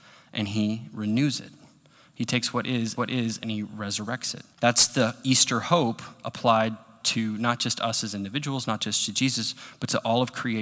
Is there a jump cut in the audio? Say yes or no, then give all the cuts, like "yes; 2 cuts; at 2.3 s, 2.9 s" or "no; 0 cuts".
yes; 2 cuts; at 3.0 s, 4.5 s